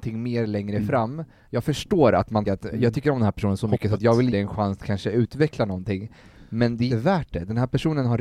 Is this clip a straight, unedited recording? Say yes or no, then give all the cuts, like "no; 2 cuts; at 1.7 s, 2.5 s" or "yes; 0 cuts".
no; 4 cuts; at 2.5 s, 4.3 s, 4.8 s, 6.9 s